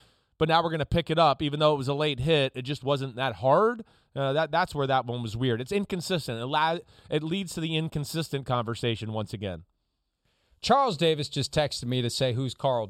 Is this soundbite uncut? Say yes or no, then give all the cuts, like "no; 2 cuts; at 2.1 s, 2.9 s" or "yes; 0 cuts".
yes; 0 cuts